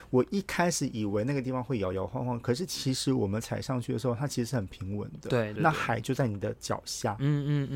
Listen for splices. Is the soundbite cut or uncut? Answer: cut